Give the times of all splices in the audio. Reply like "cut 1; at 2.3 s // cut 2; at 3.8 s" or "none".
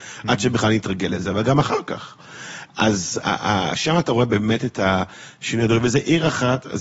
cut 1; at 3.2 s